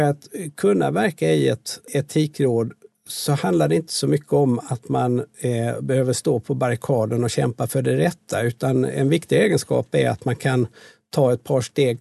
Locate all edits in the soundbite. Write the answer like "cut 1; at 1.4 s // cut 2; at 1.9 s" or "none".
none